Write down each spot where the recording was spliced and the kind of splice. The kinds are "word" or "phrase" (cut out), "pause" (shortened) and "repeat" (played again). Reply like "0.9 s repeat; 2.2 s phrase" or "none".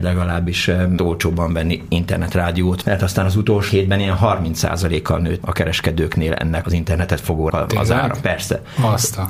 1.0 s word; 2.8 s word; 3.7 s word; 5.4 s word; 6.6 s word; 7.5 s word